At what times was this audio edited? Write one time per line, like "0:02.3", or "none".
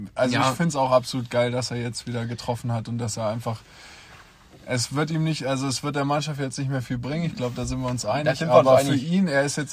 none